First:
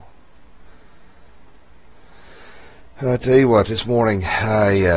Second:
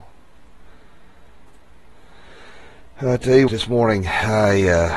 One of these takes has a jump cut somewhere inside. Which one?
second; 1 cut; at 3.5 s

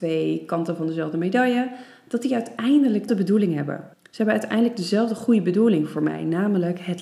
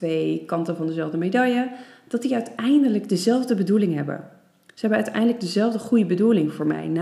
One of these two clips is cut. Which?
first; 2 cuts; at 3.1 s, 3.9 s

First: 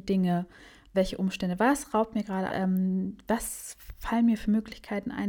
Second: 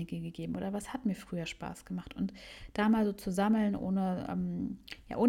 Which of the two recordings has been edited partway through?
first; 2 cuts; at 0.9 s, 2.5 s

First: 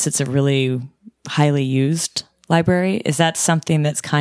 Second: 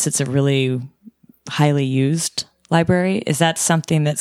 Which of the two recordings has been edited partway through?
first; 1 cut; at 1.2 s

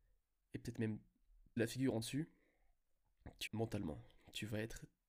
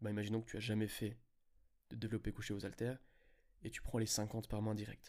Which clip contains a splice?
first; 3 cuts; at 1.6 s, 2.0 s, 3.5 s

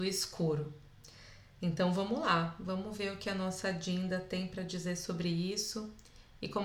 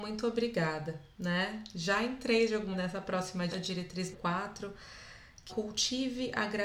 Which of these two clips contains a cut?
second; 5 cuts; at 1.1 s, 2.7 s, 3.5 s, 4.1 s, 5.5 s

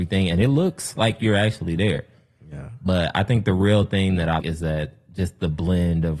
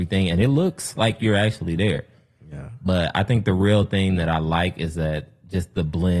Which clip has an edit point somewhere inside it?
first; 1 cut; at 4.4 s

